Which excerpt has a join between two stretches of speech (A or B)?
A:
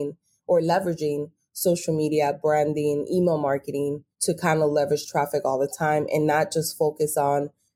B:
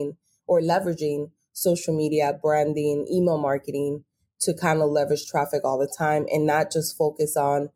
A